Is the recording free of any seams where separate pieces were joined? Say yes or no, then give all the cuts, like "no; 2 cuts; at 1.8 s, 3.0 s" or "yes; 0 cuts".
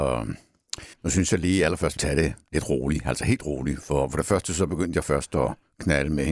no; 3 cuts; at 0.9 s, 2.0 s, 2.4 s